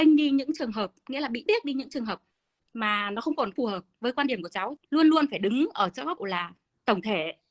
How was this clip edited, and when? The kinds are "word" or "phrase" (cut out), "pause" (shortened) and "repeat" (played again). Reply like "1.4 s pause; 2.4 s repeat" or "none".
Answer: 1.5 s word; 3.6 s word; 4.8 s word; 6.2 s word